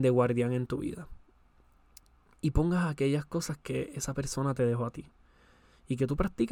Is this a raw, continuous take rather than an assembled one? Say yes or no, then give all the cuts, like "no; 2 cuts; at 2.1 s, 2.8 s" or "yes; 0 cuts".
yes; 0 cuts